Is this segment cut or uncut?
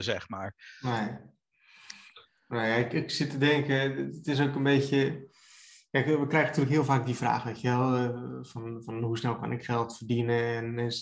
uncut